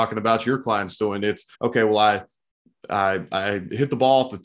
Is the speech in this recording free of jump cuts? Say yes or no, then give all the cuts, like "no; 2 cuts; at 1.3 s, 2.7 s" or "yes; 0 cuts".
no; 1 cut; at 1.5 s